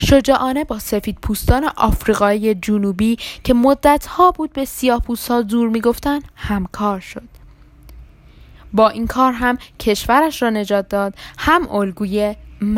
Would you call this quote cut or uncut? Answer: uncut